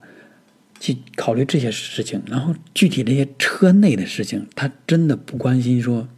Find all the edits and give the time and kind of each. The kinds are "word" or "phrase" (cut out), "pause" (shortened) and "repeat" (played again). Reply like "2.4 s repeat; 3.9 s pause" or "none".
none